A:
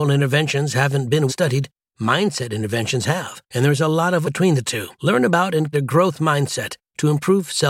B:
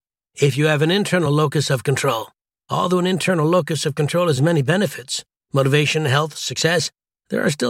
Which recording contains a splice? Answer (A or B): A